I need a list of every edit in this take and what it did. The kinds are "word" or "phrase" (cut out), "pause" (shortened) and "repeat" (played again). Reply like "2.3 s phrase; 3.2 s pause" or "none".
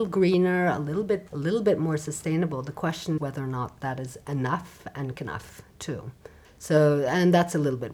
1.3 s word; 3.2 s word; 5.1 s word; 6.4 s pause